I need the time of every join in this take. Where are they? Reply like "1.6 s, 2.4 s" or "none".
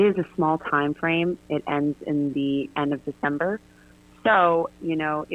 none